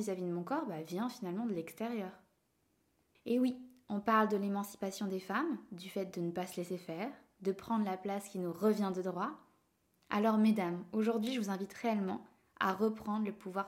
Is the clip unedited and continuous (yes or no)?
yes